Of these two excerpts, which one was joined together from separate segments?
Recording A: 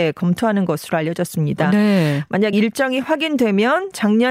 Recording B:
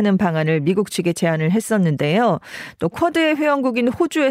A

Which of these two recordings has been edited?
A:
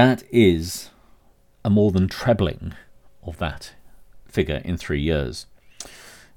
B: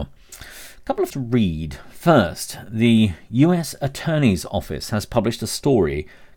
B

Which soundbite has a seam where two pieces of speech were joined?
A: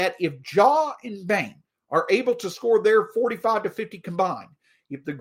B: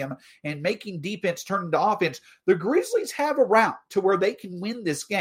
A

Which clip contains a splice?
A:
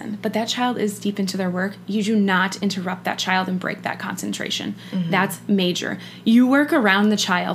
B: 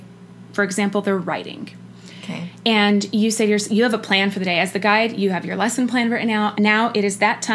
B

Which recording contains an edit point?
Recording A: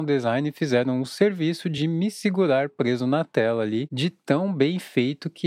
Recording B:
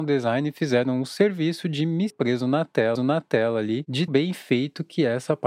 B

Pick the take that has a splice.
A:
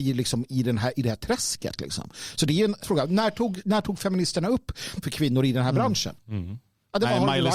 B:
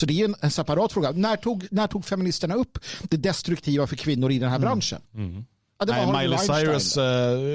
A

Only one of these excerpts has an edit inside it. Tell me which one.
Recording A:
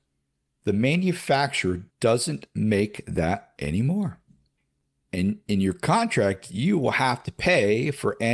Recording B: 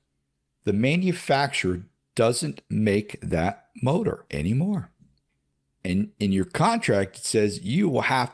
A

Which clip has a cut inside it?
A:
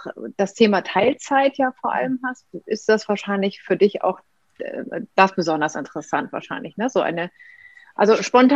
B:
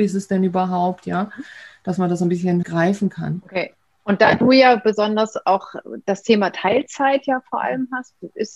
B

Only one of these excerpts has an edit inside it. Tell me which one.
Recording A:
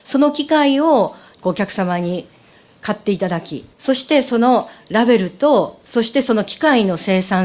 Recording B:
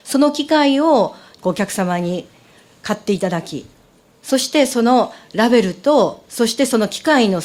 A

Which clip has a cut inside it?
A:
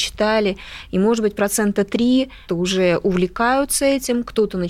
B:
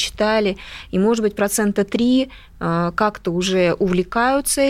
A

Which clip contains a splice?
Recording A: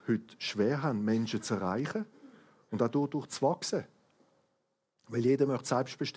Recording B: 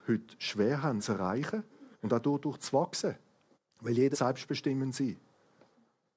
B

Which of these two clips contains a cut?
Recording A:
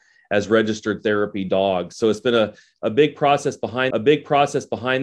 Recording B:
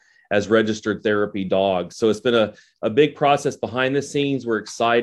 A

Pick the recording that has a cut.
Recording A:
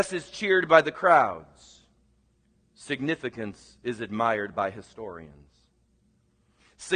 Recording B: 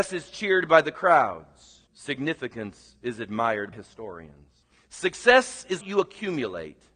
B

